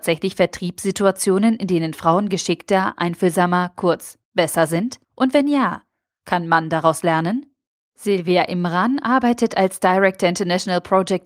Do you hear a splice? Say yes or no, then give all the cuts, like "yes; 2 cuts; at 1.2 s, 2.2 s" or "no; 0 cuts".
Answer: yes; 2 cuts; at 4.2 s, 5.0 s